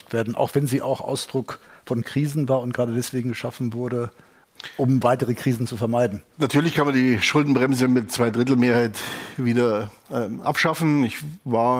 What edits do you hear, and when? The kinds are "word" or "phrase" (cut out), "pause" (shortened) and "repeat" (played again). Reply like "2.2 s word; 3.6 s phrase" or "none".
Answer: none